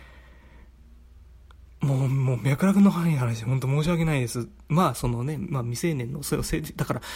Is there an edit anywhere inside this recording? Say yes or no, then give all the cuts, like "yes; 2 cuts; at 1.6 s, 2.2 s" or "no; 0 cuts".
yes; 1 cut; at 1.7 s